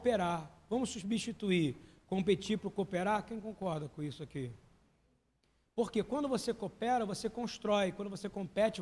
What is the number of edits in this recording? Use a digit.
0